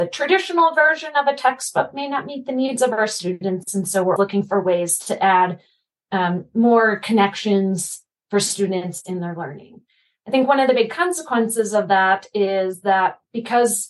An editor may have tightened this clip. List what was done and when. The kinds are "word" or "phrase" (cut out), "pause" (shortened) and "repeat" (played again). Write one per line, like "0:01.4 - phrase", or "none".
0:04.2 - word